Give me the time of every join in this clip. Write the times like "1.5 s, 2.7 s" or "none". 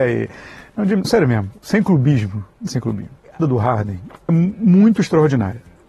1.0 s, 2.7 s, 3.4 s, 4.3 s